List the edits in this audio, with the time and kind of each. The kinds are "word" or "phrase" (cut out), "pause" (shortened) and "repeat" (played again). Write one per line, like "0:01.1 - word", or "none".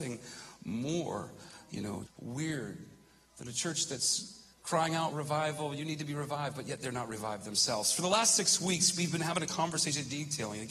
0:02.1 - word
0:04.5 - pause
0:05.1 - word

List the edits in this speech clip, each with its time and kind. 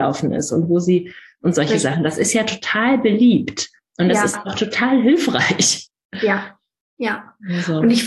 none

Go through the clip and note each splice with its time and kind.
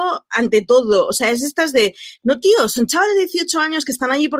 none

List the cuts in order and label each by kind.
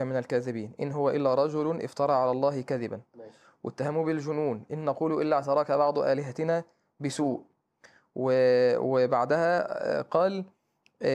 none

